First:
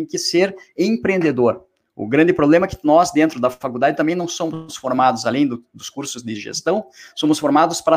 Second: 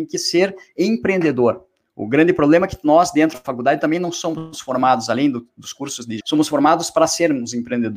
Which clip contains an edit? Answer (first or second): second